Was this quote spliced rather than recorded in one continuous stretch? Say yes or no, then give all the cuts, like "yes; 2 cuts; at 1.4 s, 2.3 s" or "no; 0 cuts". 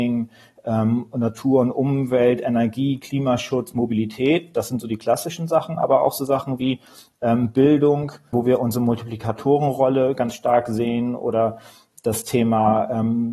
yes; 1 cut; at 8.3 s